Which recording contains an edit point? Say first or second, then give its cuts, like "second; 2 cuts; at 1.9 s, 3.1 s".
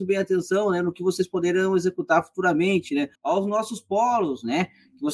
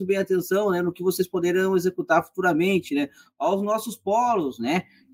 first; 1 cut; at 3.1 s